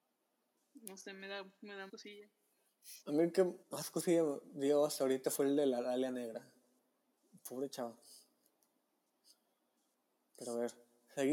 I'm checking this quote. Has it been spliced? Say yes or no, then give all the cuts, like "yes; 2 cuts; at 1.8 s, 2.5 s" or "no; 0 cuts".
yes; 4 cuts; at 1.9 s, 3.0 s, 3.6 s, 7.2 s